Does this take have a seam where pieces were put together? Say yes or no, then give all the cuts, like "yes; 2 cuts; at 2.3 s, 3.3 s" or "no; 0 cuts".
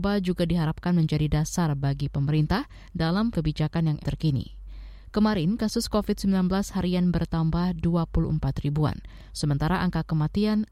yes; 2 cuts; at 3.3 s, 4.0 s